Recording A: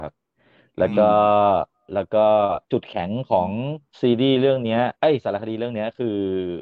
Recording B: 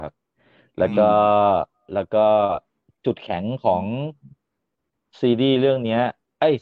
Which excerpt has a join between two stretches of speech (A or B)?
A